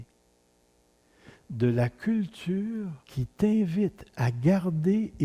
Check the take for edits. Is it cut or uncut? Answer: cut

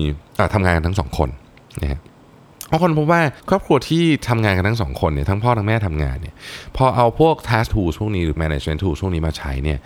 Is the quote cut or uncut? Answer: cut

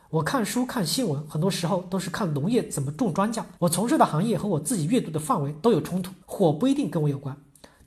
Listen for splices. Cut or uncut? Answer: cut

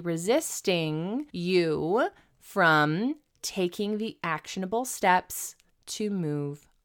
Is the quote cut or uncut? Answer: cut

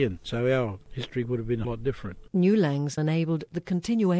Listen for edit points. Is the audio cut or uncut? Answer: cut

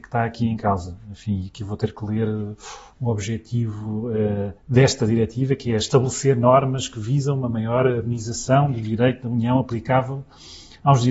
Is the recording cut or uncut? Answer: cut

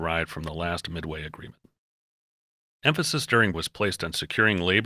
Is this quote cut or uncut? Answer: cut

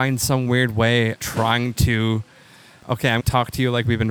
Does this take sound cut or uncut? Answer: cut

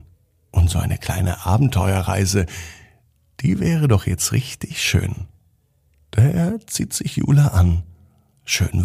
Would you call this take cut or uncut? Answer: uncut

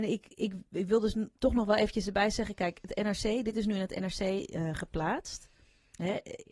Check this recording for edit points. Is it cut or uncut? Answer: uncut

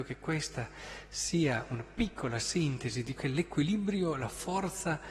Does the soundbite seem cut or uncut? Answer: cut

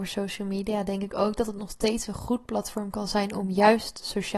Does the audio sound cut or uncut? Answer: uncut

